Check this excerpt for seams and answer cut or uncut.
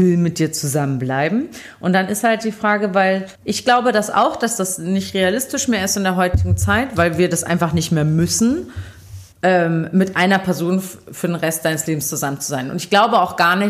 cut